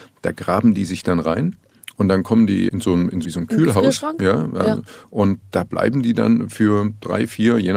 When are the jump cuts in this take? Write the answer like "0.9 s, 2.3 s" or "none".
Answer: 2.7 s, 3.2 s